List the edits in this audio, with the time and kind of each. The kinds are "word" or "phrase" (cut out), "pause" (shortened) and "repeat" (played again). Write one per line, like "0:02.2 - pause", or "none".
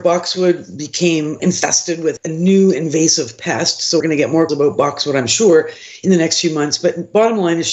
0:01.4 - word
0:02.2 - word
0:04.0 - word
0:04.5 - word